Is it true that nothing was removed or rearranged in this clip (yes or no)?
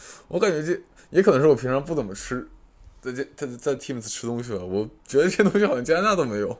yes